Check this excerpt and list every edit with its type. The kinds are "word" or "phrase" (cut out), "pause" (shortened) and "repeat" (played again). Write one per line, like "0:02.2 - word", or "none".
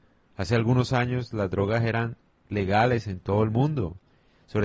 none